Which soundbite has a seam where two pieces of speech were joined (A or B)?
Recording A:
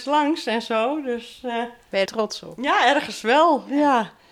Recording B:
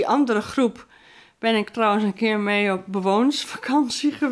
A